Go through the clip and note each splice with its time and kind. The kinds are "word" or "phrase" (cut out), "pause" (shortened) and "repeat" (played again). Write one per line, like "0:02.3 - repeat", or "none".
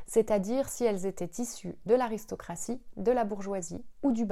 none